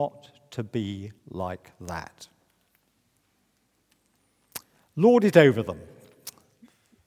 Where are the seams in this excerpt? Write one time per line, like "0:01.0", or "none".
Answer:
0:01.2